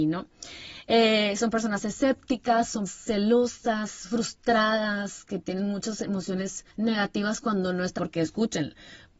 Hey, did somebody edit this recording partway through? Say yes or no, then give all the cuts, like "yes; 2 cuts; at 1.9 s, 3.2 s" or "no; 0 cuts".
yes; 3 cuts; at 2.9 s, 6.7 s, 8.0 s